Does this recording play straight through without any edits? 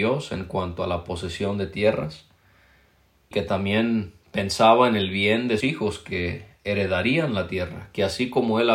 no; 2 cuts; at 3.3 s, 5.6 s

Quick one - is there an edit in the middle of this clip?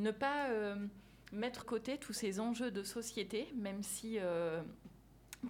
yes; 1 cut; at 1.6 s

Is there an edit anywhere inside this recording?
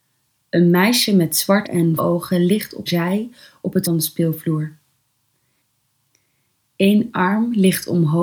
yes; 4 cuts; at 1.6 s, 2.0 s, 2.9 s, 3.8 s

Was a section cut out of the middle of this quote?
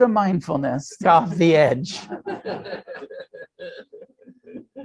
yes; 1 cut; at 1.0 s

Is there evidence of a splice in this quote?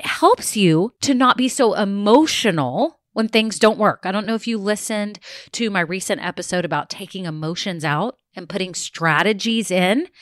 no; 0 cuts

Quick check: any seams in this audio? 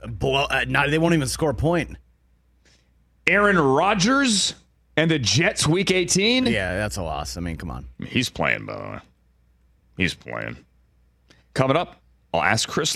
no; 0 cuts

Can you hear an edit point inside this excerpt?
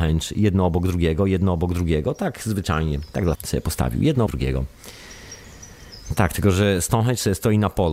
yes; 2 cuts; at 3.3 s, 4.3 s

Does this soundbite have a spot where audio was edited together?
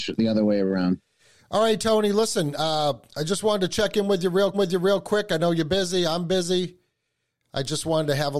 yes; 1 cut; at 4.5 s

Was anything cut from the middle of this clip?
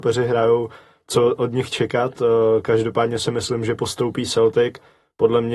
no; 0 cuts

